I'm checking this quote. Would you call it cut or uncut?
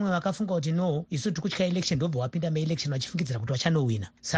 uncut